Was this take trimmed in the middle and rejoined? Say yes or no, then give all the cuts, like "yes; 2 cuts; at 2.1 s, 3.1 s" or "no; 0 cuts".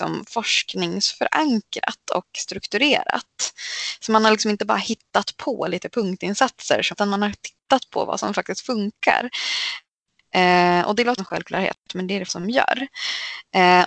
yes; 3 cuts; at 6.9 s, 11.2 s, 12.3 s